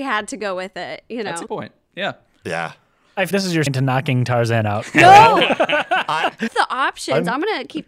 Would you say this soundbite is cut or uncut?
cut